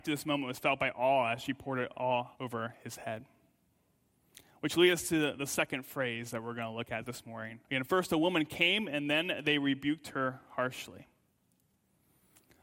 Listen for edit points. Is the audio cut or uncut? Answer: cut